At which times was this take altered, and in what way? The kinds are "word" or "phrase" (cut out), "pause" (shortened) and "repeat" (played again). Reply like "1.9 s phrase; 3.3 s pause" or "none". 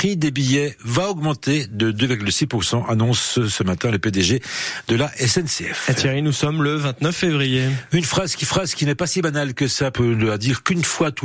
8.4 s repeat; 9.9 s word